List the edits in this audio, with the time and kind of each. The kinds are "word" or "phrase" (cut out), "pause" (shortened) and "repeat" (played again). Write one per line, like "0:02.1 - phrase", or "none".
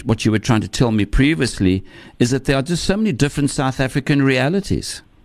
none